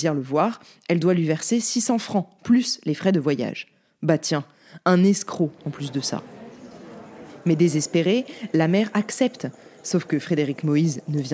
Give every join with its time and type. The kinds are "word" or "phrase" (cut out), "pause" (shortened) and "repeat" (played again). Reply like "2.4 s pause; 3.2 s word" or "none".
none